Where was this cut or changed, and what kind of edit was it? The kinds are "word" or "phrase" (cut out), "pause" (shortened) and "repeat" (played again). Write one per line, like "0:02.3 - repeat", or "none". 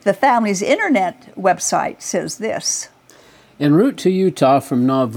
none